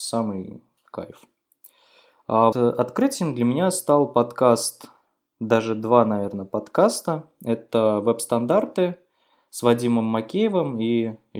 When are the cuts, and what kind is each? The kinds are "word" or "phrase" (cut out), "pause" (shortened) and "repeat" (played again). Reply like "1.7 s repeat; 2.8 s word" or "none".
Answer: 2.5 s word